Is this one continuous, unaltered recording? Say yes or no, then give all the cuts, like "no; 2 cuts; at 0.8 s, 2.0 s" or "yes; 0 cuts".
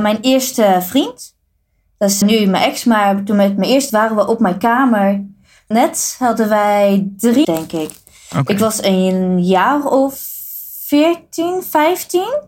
no; 4 cuts; at 2.2 s, 3.9 s, 5.7 s, 7.4 s